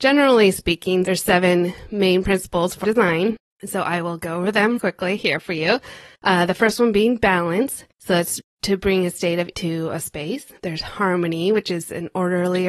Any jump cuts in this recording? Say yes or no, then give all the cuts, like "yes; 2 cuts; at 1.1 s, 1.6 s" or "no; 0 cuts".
yes; 6 cuts; at 2.8 s, 4.8 s, 6.1 s, 7.9 s, 9.5 s, 10.6 s